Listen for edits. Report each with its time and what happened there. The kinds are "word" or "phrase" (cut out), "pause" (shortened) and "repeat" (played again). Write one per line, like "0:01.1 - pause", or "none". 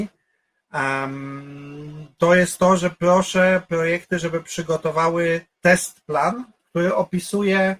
0:05.5 - pause
0:06.6 - pause